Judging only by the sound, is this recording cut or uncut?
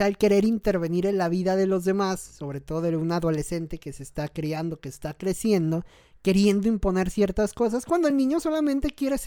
uncut